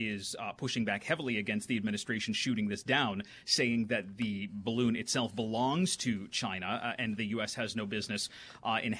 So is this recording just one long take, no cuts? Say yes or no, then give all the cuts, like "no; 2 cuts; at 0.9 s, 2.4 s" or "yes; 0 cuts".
yes; 0 cuts